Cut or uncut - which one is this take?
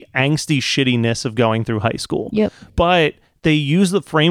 cut